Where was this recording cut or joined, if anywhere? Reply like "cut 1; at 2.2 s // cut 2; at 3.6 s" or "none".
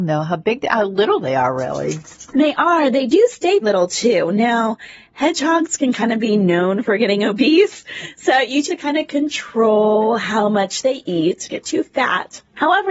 cut 1; at 2.3 s // cut 2; at 3.6 s // cut 3; at 8.7 s // cut 4; at 11.5 s